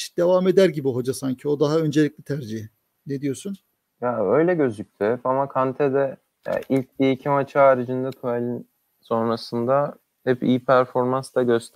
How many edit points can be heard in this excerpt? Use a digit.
1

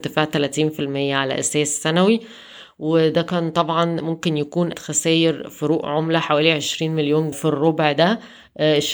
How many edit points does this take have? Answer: 2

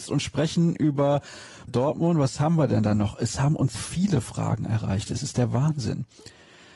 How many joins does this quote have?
2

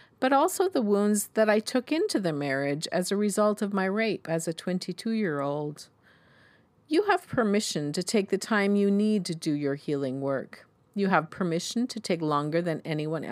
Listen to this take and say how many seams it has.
0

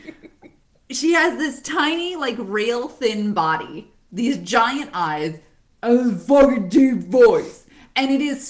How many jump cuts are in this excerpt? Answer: 0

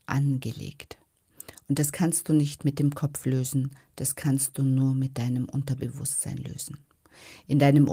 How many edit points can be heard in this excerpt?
0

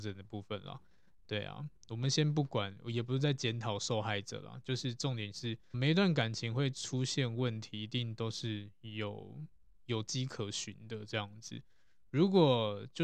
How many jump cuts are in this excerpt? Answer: 1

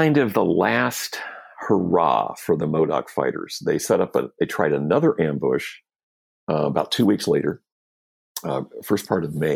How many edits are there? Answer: 0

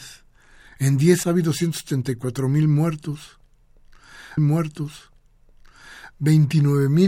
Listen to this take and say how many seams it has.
2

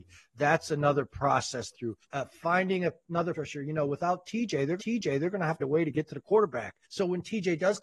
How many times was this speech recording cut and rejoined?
6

